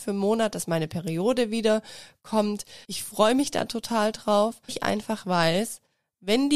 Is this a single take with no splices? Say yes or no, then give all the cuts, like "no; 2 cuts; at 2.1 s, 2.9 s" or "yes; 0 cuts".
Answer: no; 2 cuts; at 2.8 s, 4.7 s